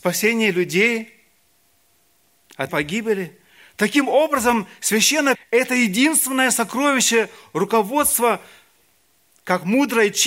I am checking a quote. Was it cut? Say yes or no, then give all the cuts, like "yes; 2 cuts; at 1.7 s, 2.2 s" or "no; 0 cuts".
yes; 2 cuts; at 2.7 s, 5.3 s